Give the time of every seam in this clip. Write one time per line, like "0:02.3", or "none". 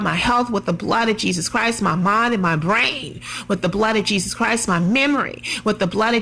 none

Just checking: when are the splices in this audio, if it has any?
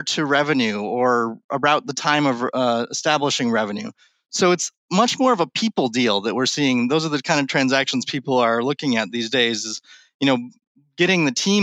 none

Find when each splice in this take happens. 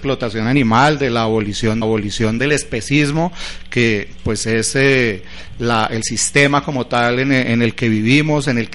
0:01.8

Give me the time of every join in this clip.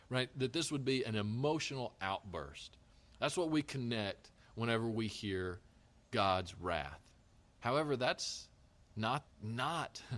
0:09.2

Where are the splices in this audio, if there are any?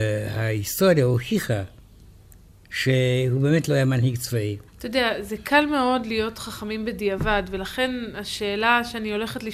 0:04.7

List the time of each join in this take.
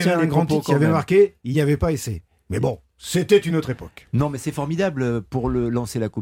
none

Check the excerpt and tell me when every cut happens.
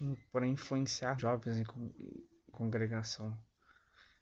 0:01.2
0:02.5

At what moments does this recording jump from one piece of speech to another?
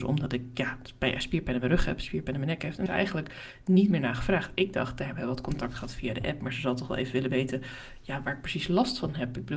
0:02.9

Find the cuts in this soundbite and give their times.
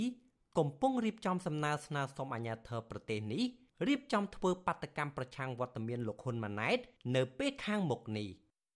none

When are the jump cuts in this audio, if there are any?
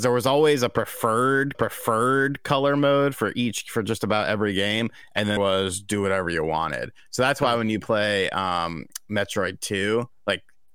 0:01.5
0:05.4

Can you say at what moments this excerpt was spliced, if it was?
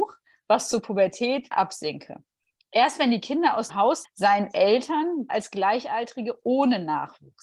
0:01.5
0:03.7
0:04.0
0:05.3

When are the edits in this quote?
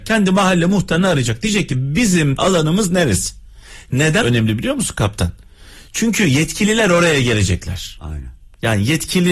0:02.4
0:04.2

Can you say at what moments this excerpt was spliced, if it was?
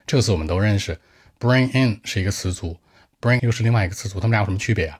0:03.4

